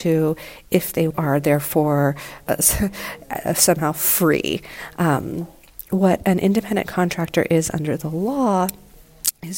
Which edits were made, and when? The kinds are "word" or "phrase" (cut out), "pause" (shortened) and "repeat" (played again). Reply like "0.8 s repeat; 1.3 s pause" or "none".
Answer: 1.1 s phrase